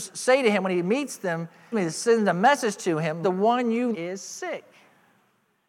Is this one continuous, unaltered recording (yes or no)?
no